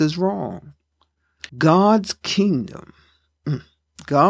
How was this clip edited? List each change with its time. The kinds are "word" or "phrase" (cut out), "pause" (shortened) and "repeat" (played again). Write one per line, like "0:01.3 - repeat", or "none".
0:01.5 - pause